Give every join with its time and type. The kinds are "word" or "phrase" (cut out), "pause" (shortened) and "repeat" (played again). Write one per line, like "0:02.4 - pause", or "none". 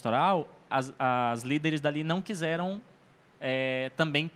none